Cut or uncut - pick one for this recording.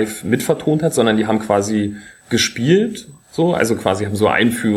uncut